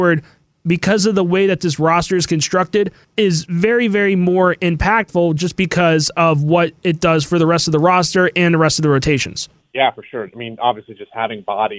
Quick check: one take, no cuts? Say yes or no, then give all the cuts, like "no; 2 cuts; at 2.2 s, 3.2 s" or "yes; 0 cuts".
yes; 0 cuts